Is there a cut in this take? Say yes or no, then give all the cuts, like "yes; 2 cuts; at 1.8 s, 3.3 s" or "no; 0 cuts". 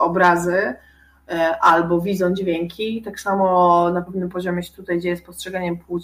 no; 0 cuts